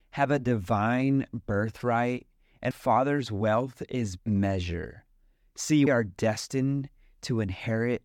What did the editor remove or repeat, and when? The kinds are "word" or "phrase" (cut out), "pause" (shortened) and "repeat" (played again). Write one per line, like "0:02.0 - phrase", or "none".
0:02.7 - word
0:04.2 - word
0:05.9 - word